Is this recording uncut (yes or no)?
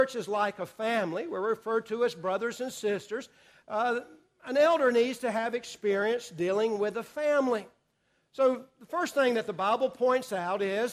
yes